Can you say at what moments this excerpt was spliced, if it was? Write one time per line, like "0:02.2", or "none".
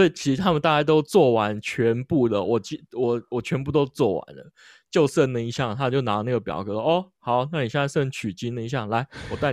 none